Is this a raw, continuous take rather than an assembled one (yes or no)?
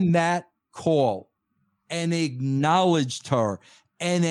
yes